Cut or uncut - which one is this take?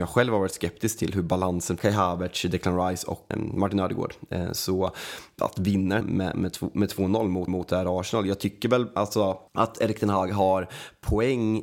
cut